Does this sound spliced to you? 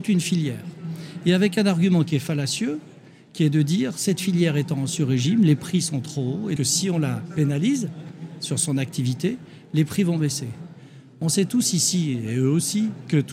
yes; 1 cut; at 6.6 s

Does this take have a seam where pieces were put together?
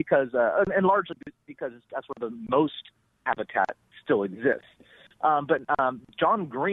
no; 0 cuts

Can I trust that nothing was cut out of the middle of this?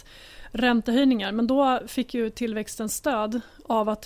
yes; 0 cuts

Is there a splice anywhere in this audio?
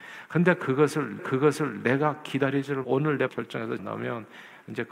yes; 4 cuts; at 1.2 s, 2.8 s, 3.3 s, 3.8 s

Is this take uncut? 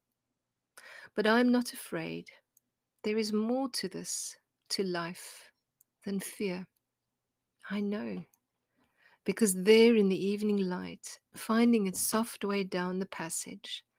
yes; 0 cuts

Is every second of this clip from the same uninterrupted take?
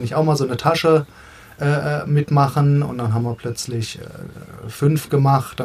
yes; 0 cuts

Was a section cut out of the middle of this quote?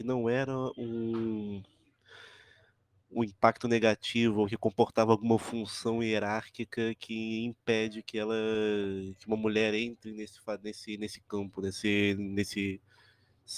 no; 0 cuts

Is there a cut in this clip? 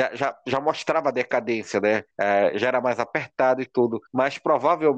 yes; 2 cuts; at 2.1 s, 4.1 s

